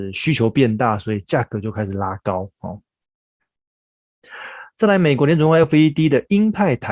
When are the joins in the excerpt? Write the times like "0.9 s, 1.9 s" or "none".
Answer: none

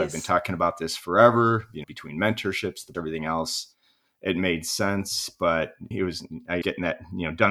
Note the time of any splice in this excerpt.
1.8 s, 2.9 s, 5.9 s, 6.6 s

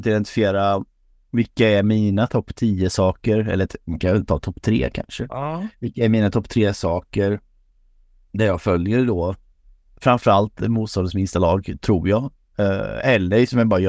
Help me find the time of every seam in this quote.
none

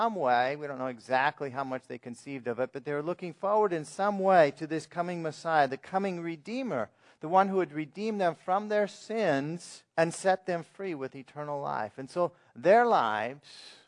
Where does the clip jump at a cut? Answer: 9.9 s

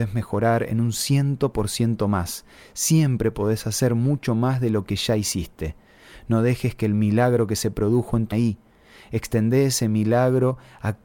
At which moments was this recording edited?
8.3 s

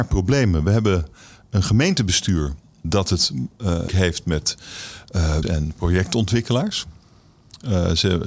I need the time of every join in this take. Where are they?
2.8 s, 3.9 s, 5.4 s

